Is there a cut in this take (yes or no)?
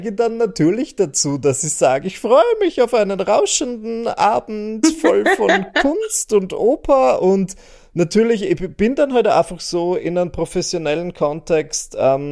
no